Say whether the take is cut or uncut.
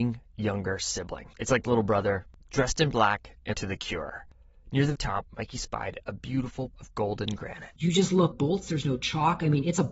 cut